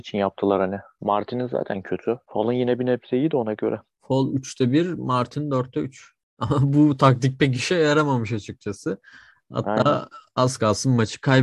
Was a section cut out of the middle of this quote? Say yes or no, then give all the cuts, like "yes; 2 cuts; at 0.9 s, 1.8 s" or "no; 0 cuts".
no; 0 cuts